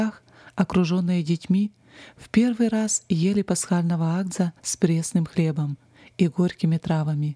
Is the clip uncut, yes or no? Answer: no